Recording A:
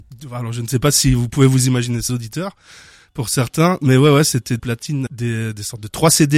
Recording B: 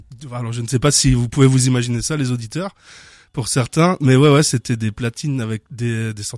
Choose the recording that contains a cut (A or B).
A